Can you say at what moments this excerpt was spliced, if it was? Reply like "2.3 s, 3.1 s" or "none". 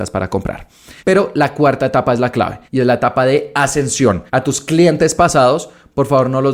1.0 s, 2.7 s, 4.3 s

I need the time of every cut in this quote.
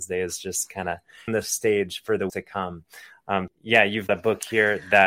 1.3 s, 2.3 s, 3.5 s, 4.1 s

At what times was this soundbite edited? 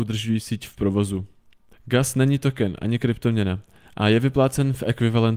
none

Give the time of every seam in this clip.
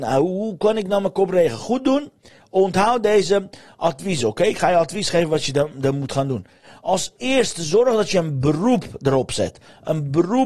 none

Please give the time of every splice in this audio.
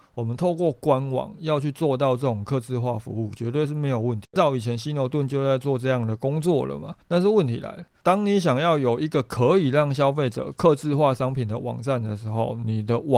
7.0 s

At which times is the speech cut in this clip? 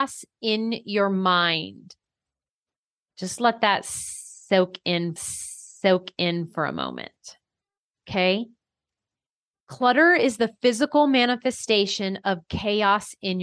5.2 s

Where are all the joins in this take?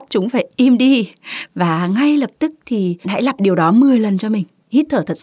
1.5 s, 3.0 s, 3.4 s

